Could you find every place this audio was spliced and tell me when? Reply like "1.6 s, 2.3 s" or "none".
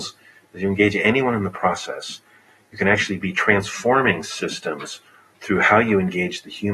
none